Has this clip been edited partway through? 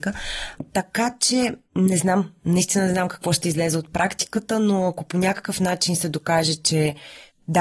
yes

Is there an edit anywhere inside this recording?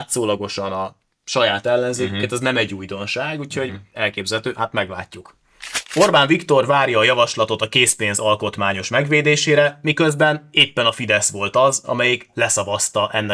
no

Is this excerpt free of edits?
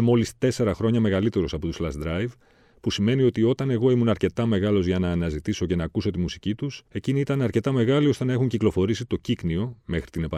no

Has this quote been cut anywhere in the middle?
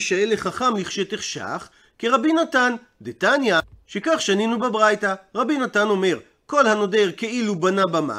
no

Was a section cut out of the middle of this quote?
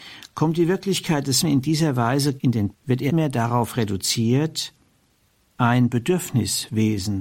yes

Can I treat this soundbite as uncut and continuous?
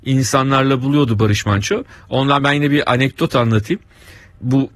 yes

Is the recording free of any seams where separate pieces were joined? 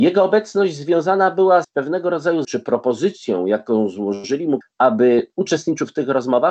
no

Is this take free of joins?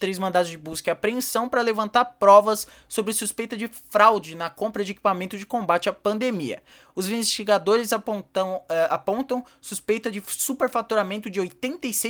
yes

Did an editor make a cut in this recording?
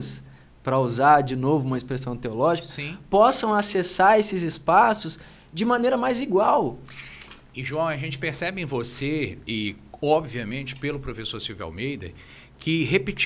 no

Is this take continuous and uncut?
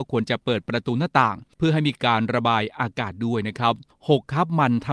no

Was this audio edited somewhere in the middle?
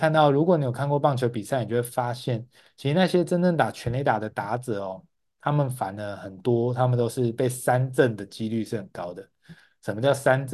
no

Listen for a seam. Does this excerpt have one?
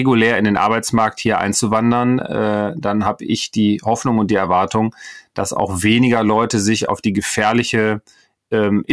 no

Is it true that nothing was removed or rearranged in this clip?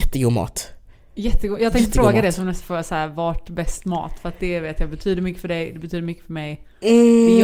yes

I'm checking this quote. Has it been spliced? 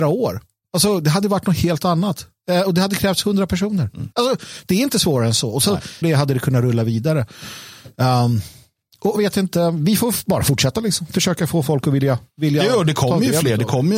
yes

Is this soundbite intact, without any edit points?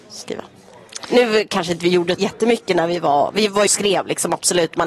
no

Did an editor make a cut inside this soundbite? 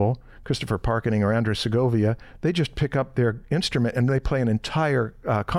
no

